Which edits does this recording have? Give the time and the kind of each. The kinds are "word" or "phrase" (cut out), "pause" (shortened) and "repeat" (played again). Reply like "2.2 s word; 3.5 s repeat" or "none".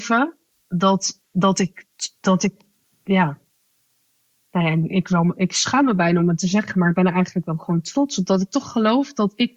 none